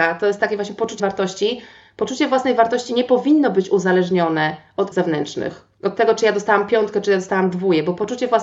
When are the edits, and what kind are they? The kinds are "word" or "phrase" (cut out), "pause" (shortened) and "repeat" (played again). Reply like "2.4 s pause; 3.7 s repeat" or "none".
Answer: 1.0 s word; 4.9 s word